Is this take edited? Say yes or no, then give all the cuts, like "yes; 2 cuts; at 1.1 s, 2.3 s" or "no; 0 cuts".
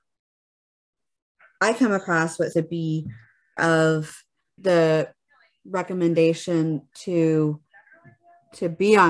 yes; 3 cuts; at 2.5 s, 3.6 s, 4.6 s